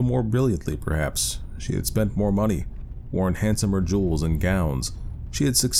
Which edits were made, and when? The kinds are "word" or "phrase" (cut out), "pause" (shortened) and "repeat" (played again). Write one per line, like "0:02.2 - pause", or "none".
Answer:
none